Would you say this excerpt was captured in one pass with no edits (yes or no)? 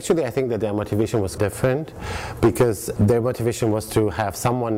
no